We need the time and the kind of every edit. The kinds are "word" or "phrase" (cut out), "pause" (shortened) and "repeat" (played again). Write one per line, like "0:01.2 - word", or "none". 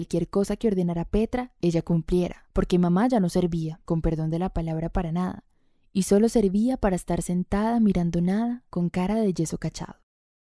none